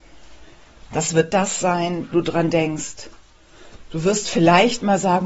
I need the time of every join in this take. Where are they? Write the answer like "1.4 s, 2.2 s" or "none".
1.3 s, 2.1 s